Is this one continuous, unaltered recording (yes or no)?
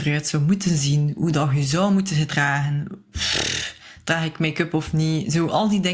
yes